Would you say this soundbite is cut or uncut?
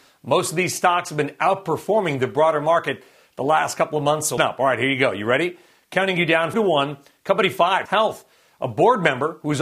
cut